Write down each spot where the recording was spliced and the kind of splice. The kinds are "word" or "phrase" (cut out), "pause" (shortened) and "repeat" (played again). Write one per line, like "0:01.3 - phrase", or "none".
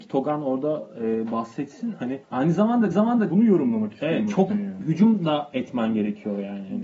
0:02.2 - pause
0:02.9 - repeat
0:04.5 - phrase